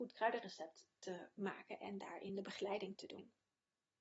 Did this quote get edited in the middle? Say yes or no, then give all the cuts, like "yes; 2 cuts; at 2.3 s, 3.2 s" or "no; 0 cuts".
no; 0 cuts